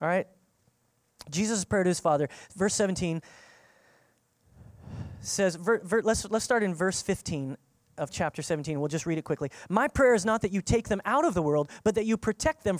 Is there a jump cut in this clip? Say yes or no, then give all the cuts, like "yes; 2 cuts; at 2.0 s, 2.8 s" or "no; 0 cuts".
no; 0 cuts